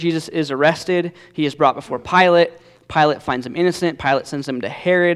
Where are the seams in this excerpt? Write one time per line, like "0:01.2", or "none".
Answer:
none

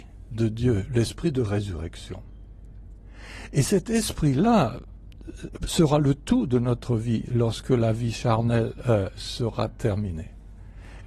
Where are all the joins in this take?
none

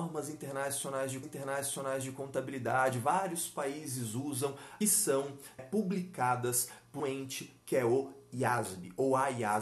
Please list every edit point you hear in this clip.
0:01.2
0:04.8
0:05.6
0:07.0

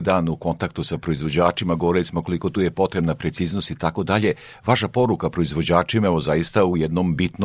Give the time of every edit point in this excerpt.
none

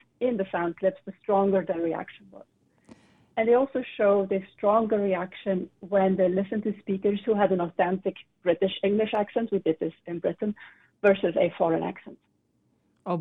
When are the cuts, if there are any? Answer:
none

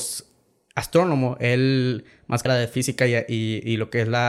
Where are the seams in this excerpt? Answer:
0:02.5

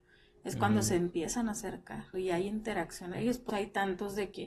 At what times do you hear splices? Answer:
0:02.1
0:03.1
0:03.5

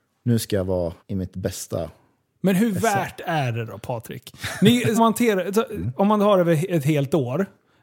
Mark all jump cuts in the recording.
0:01.0
0:05.0

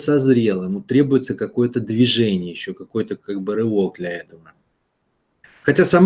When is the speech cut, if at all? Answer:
none

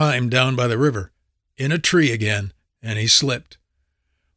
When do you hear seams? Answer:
none

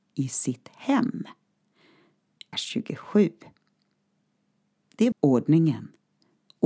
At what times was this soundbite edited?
0:02.5
0:05.1

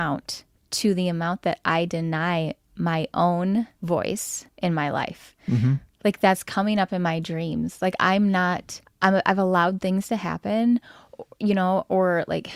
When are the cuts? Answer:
none

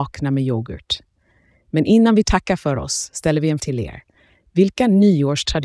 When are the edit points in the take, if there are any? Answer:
0:03.6

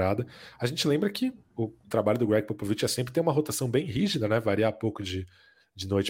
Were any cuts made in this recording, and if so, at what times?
none

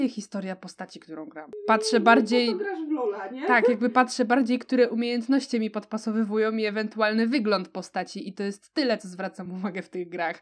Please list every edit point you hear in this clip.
none

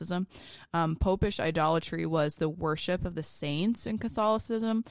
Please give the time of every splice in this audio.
none

